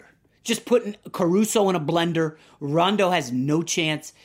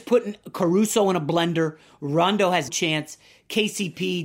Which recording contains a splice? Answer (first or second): second